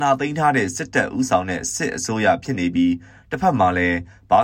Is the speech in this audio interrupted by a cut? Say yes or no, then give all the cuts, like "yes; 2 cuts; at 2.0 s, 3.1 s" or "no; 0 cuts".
no; 0 cuts